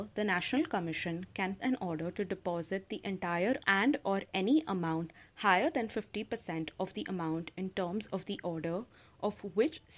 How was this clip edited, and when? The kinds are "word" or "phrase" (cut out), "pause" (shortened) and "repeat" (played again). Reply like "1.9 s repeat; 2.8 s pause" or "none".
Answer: 1.6 s word; 3.6 s word